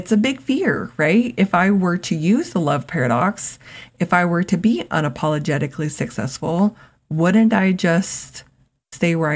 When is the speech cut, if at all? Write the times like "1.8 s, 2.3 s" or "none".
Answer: none